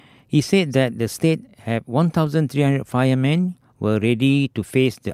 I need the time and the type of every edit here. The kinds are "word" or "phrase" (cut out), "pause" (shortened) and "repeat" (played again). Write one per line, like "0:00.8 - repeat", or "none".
none